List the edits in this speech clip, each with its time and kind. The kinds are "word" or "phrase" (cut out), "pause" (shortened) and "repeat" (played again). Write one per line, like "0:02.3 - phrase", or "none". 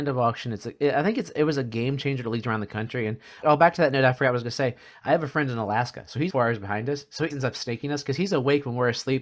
0:03.4 - word
0:06.3 - word
0:07.3 - word